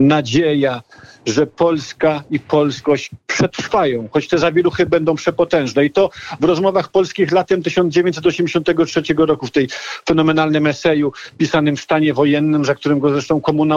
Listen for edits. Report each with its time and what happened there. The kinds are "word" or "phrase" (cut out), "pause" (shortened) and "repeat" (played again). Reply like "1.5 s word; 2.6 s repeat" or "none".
none